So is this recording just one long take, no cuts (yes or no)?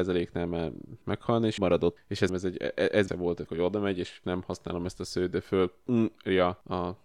no